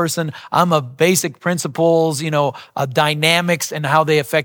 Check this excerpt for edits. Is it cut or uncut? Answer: uncut